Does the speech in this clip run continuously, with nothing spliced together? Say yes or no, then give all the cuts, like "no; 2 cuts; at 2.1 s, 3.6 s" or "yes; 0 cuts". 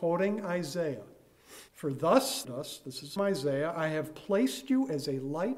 no; 3 cuts; at 1.7 s, 2.4 s, 3.2 s